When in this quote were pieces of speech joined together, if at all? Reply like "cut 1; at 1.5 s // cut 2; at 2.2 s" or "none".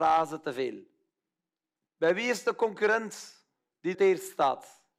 cut 1; at 3.9 s